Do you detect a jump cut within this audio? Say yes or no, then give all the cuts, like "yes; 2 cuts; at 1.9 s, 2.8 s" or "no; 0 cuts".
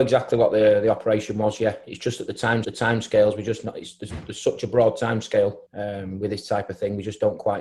yes; 2 cuts; at 2.6 s, 5.7 s